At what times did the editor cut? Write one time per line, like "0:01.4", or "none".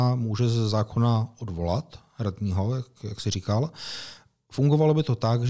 none

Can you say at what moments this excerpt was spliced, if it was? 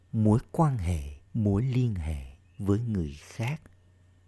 0:01.3
0:02.5

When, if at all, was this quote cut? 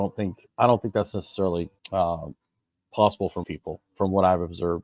0:01.8
0:03.4

